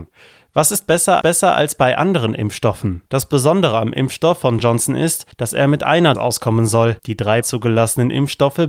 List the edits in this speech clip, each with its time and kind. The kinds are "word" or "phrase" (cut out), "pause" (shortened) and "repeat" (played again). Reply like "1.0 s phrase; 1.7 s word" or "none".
1.2 s repeat; 3.1 s pause; 4.6 s word; 5.3 s pause; 6.1 s word; 7.0 s pause; 7.4 s phrase